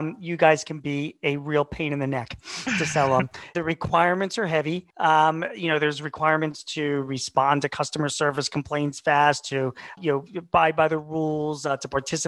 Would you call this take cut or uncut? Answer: cut